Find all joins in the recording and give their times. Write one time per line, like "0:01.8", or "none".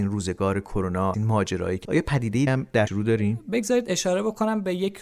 0:01.1
0:01.8
0:02.5
0:02.9